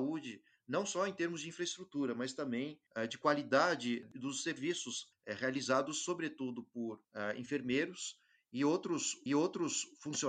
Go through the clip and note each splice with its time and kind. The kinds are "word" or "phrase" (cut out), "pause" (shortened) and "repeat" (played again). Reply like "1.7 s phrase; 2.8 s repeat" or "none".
2.9 s pause; 9.3 s repeat